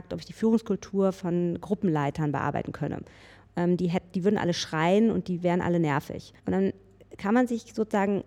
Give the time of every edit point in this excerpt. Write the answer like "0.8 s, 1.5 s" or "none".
6.4 s